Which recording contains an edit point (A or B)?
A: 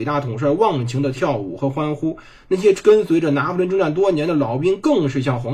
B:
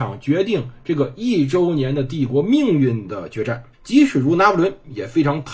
B